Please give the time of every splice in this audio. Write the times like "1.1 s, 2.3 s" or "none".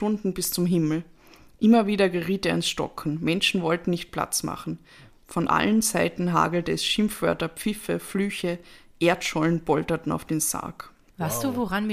none